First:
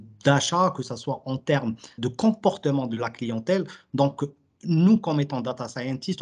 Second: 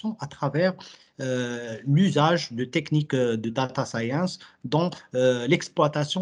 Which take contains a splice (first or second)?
first